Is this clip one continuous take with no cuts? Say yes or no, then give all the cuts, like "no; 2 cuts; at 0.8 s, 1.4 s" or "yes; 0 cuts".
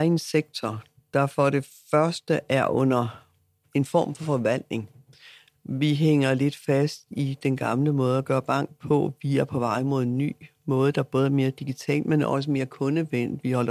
yes; 0 cuts